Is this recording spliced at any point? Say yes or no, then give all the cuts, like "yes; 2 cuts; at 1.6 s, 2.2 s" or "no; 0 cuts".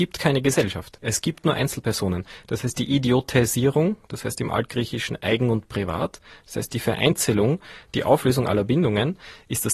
no; 0 cuts